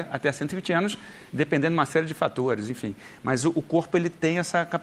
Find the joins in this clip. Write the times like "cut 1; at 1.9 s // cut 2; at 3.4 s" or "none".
none